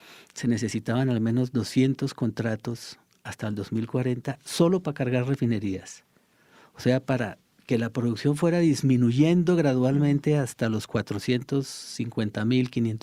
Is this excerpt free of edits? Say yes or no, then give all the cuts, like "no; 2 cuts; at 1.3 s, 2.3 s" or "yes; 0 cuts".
yes; 0 cuts